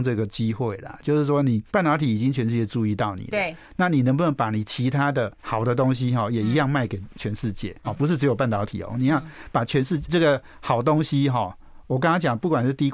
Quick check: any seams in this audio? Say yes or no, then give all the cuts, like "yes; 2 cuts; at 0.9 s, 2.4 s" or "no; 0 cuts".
yes; 4 cuts; at 1.7 s, 5.4 s, 7.8 s, 10.1 s